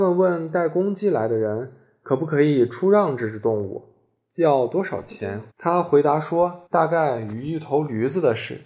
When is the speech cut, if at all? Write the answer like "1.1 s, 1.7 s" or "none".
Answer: 5.5 s, 6.7 s